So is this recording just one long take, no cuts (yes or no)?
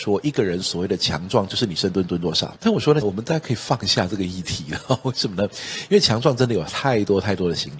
no